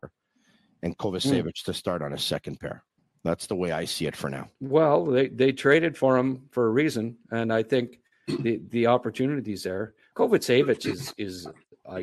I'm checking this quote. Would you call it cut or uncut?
cut